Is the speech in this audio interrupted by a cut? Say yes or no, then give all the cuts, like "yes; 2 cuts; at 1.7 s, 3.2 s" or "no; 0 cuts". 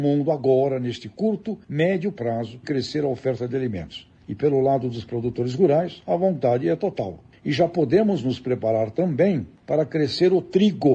yes; 1 cut; at 2.6 s